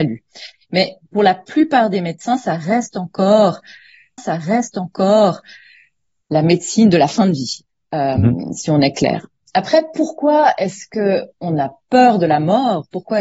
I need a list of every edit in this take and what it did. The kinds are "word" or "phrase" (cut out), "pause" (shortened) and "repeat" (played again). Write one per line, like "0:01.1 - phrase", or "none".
0:04.2 - repeat